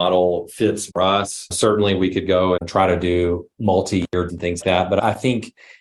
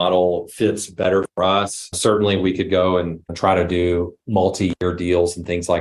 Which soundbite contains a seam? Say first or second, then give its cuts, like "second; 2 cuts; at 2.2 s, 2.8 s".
first; 4 cuts; at 0.9 s, 2.6 s, 4.3 s, 4.6 s